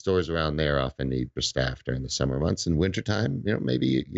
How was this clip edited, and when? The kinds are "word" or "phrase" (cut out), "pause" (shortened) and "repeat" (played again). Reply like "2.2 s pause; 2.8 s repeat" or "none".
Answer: 1.4 s word